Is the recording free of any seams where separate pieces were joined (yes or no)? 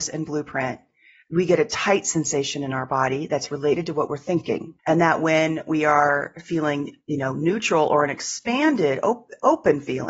no